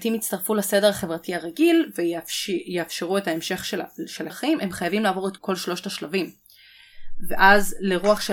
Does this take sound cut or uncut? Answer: cut